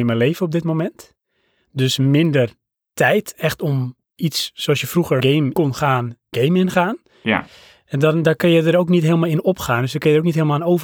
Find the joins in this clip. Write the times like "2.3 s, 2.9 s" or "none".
5.2 s, 5.5 s, 6.3 s